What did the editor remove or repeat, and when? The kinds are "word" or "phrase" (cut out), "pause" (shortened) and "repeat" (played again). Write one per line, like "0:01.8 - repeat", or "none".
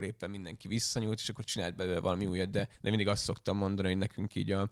0:02.7 - pause